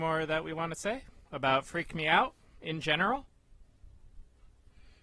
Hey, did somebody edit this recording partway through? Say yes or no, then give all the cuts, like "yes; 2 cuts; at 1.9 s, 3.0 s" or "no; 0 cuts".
no; 0 cuts